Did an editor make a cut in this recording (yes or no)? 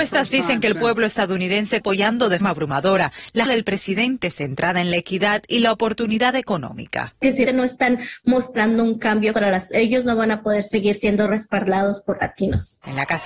yes